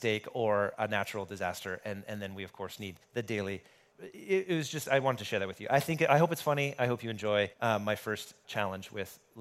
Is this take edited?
yes; 4 cuts; at 3.0 s, 3.9 s, 7.5 s, 8.4 s

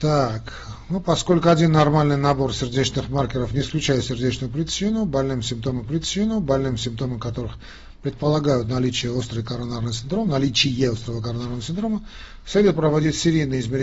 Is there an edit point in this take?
yes; 1 cut; at 5.8 s

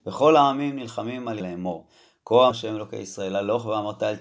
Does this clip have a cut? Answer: yes; 2 cuts; at 1.4 s, 2.5 s

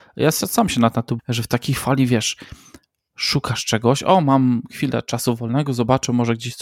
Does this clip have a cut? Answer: yes; 1 cut; at 1.2 s

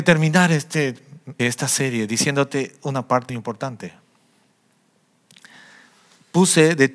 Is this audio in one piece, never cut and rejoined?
no; 2 cuts; at 1.4 s, 3.3 s

